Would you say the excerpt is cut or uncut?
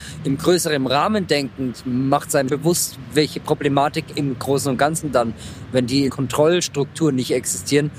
cut